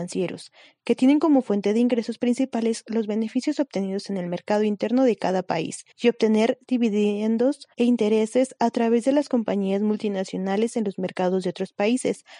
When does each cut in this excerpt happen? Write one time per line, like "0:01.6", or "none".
0:05.9
0:07.7